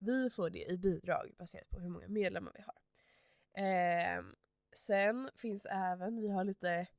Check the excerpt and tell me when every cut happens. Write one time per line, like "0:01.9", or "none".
none

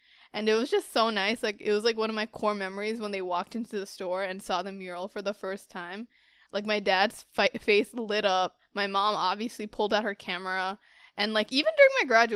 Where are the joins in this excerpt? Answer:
none

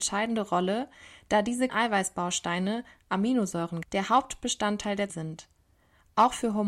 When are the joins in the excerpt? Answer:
0:01.7
0:03.8
0:05.1

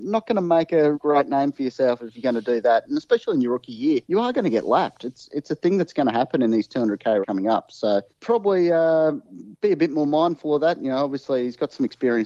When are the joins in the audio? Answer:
0:00.9
0:04.0
0:07.2
0:08.1

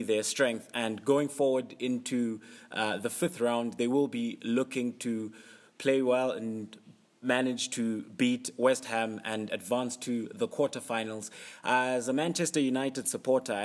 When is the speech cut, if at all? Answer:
none

